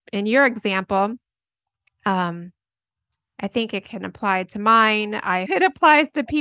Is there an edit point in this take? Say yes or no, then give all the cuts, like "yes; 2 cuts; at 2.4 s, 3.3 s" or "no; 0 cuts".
yes; 1 cut; at 5.5 s